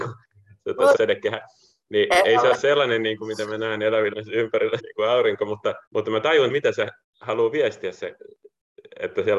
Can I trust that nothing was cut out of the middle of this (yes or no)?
no